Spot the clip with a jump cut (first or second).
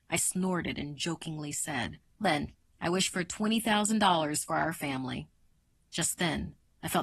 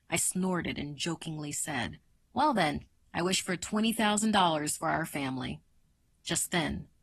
first